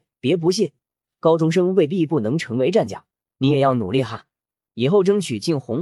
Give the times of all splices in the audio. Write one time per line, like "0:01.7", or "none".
none